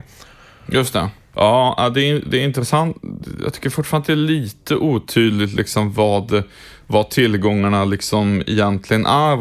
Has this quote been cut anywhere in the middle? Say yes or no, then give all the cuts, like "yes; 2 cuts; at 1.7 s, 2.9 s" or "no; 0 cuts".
no; 0 cuts